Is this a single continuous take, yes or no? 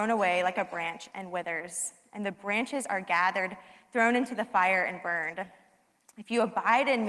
yes